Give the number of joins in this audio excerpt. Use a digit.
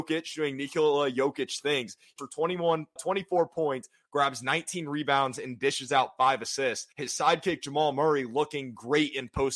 3